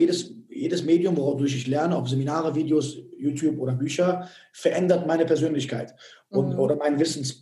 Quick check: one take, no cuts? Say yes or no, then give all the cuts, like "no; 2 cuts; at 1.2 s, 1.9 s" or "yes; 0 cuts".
yes; 0 cuts